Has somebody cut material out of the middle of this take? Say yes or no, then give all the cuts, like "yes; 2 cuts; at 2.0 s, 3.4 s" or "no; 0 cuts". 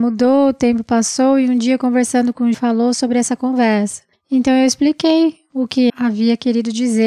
yes; 3 cuts; at 2.5 s, 4.1 s, 5.9 s